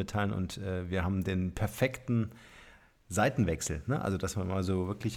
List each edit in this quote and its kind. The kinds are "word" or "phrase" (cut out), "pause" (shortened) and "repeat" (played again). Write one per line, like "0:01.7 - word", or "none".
none